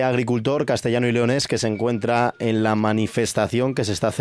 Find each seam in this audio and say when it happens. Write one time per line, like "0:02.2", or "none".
none